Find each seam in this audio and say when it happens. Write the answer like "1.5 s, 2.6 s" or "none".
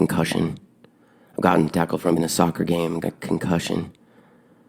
1.7 s, 2.2 s, 3.0 s

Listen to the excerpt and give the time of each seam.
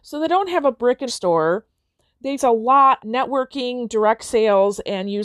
1.1 s, 2.4 s, 3.0 s

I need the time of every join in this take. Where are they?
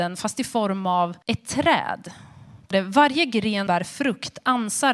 1.2 s, 2.7 s, 3.7 s

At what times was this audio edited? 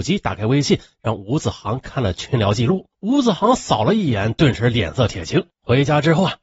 2.9 s

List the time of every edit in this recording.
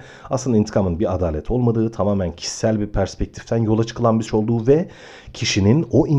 4.3 s

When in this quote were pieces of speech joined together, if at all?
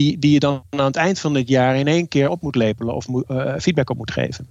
none

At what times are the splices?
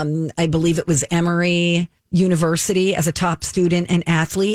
2.0 s

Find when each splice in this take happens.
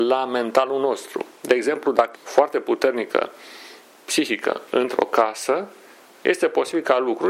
1.4 s, 2.1 s, 3.9 s

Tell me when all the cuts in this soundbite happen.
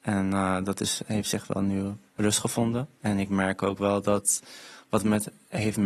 2.1 s, 2.9 s

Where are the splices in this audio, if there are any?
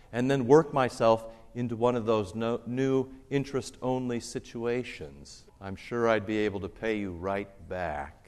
5.5 s

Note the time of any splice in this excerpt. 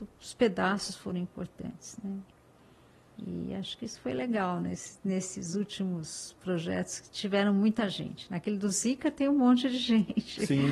none

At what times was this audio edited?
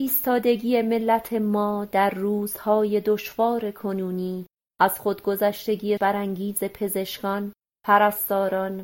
6.0 s

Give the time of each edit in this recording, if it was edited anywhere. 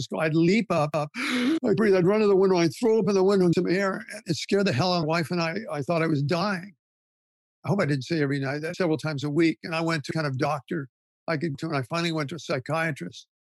1.8 s, 3.5 s, 4.2 s, 5.0 s, 8.7 s, 10.1 s, 11.5 s

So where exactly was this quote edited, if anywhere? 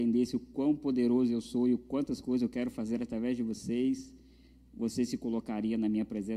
none

